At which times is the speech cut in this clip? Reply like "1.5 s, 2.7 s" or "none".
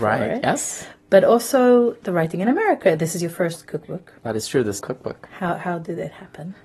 4.2 s, 4.8 s